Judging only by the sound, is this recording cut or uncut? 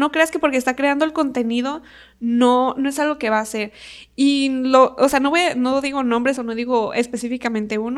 uncut